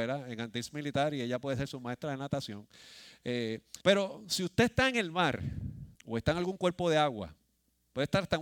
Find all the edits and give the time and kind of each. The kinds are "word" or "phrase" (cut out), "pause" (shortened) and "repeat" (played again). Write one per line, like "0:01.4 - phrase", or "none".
0:03.8 - pause
0:06.0 - pause